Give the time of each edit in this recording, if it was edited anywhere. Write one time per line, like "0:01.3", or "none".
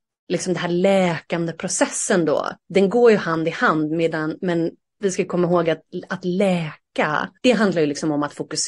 0:02.6
0:07.4